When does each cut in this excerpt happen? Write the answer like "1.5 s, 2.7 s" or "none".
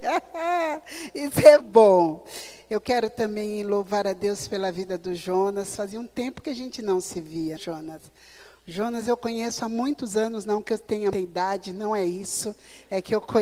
1.6 s, 7.6 s, 11.1 s